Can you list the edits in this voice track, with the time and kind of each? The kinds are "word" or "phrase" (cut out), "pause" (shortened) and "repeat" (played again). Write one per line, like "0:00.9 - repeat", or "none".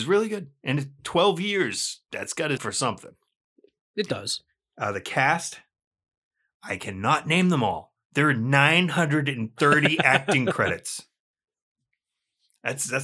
0:02.6 - word